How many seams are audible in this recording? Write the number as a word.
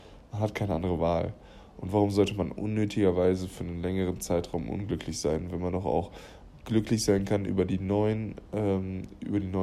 zero